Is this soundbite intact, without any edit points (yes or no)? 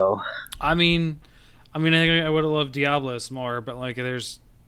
yes